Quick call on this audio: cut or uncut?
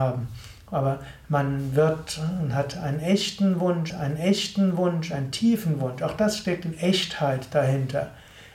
cut